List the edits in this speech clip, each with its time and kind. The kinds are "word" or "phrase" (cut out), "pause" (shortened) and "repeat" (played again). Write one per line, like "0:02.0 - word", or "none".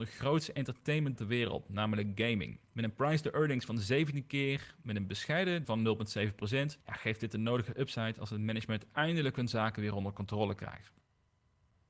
0:01.2 - word
0:02.7 - pause
0:05.6 - word
0:06.8 - pause